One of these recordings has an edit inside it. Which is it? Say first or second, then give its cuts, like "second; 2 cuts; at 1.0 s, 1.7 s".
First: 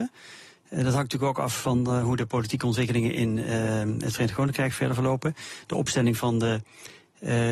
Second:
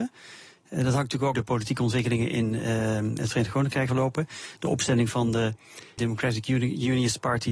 second; 3 cuts; at 1.3 s, 3.9 s, 6.0 s